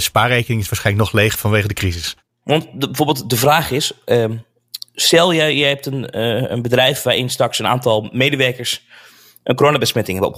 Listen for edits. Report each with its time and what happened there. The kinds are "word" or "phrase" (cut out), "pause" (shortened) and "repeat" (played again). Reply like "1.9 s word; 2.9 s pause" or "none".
none